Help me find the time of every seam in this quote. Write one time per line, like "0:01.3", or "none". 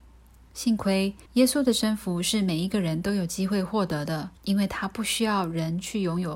0:01.3
0:04.4

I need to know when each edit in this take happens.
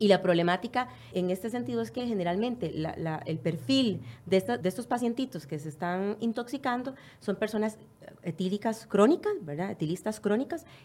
0:01.1
0:04.6

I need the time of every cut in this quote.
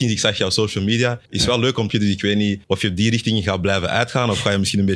0:01.3
0:01.9
0:02.6

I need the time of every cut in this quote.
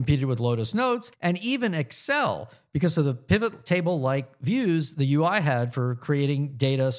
0:01.1

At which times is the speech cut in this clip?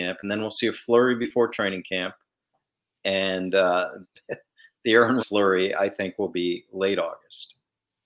0:04.0
0:05.2

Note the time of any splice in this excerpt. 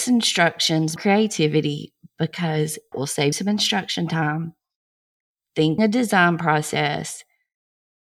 0:01.0
0:02.9
0:03.3
0:05.8

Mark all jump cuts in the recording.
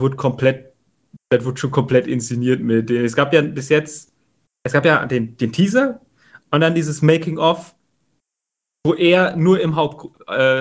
none

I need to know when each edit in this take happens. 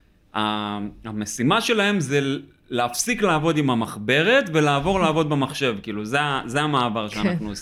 none

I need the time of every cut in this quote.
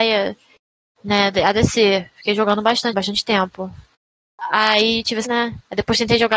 0:02.9
0:05.2

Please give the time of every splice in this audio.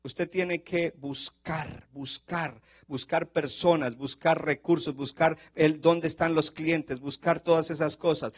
none

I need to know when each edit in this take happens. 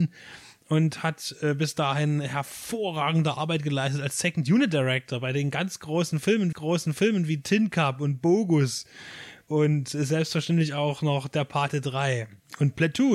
0:06.5

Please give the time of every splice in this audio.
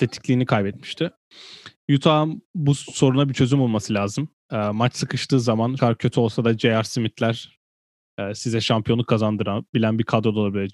0:05.8

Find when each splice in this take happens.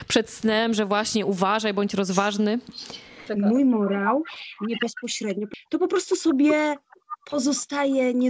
0:04.8

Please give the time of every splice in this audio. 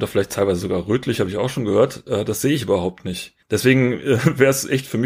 0:03.4

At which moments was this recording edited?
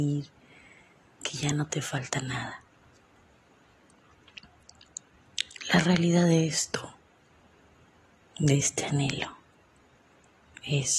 none

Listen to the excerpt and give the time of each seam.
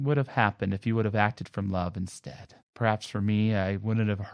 0:02.6

